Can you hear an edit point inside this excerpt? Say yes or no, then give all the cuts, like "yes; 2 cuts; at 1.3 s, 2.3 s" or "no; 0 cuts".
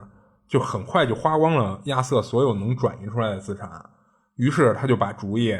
no; 0 cuts